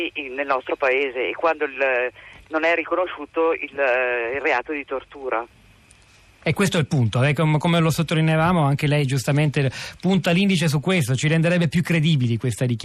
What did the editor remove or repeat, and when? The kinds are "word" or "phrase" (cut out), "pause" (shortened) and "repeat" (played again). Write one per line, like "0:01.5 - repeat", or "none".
none